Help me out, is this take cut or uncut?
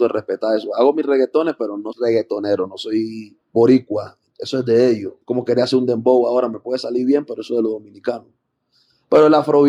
cut